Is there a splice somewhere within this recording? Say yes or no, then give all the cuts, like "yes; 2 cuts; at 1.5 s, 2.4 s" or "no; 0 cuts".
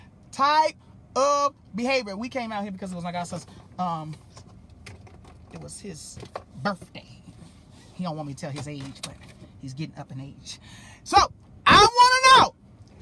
no; 0 cuts